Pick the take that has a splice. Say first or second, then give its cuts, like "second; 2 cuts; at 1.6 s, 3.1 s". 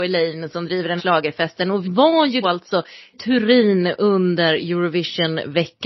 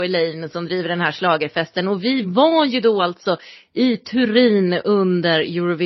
first; 4 cuts; at 1.0 s, 1.8 s, 2.4 s, 3.1 s